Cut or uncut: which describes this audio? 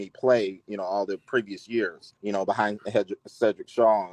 cut